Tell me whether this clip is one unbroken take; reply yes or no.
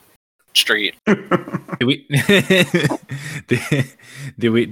no